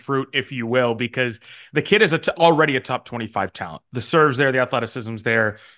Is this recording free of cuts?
yes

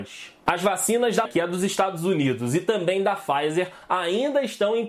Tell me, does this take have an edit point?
yes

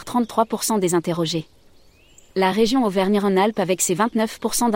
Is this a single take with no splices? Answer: yes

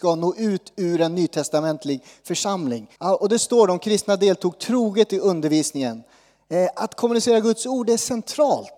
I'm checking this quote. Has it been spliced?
yes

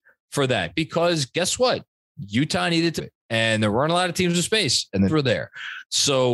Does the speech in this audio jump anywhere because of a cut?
yes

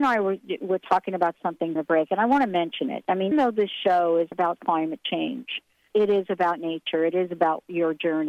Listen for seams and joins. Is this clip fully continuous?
no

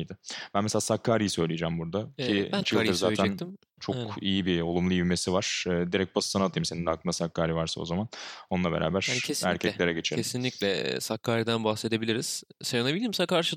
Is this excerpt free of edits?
no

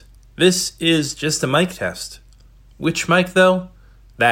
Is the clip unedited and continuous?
yes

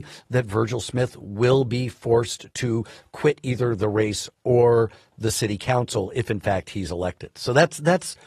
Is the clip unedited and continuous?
yes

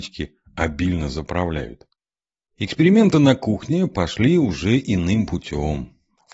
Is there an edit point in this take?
no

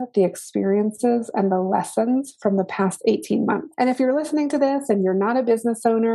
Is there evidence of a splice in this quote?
no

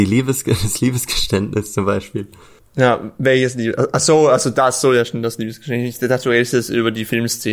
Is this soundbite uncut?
yes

